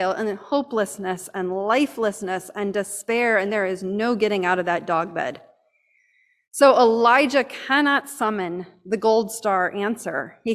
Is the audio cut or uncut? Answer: uncut